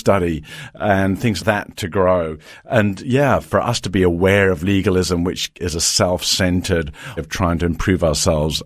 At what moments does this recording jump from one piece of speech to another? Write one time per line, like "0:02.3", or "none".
0:01.4
0:05.6
0:07.2

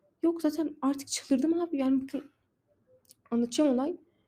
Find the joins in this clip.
none

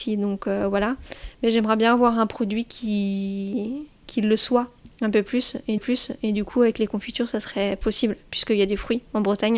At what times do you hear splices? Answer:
0:05.8

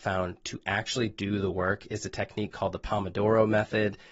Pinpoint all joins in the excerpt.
none

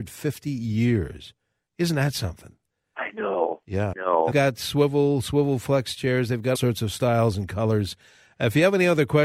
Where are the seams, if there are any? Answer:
0:03.9
0:04.3
0:06.6

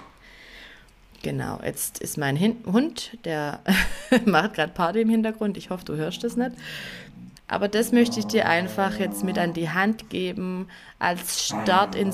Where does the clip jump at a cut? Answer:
0:07.4

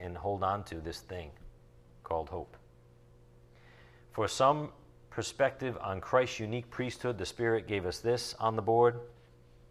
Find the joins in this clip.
none

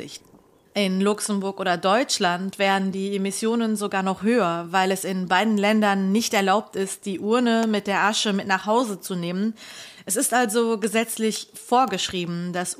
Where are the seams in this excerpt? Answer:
none

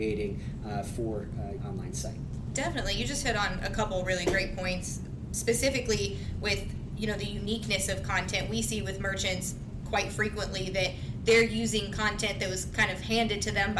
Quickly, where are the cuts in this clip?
0:01.6

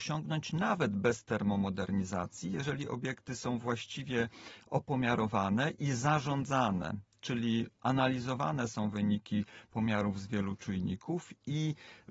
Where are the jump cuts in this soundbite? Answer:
none

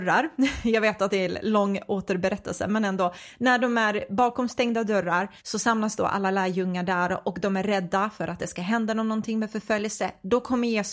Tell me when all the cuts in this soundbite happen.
0:05.4

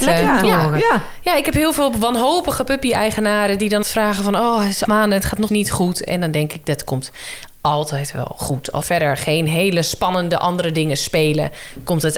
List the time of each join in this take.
0:03.8
0:04.9
0:05.5
0:08.8

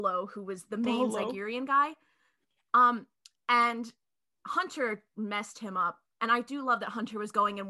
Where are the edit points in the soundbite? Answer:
none

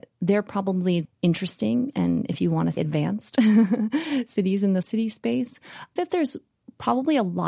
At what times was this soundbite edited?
0:01.0
0:02.8
0:04.8
0:06.0

